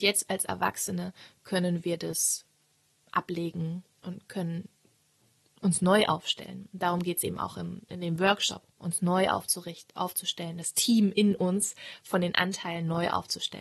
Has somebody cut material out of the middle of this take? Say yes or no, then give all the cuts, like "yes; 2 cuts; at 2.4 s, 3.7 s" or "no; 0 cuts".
no; 0 cuts